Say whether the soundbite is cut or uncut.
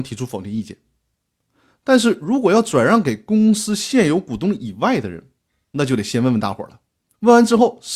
uncut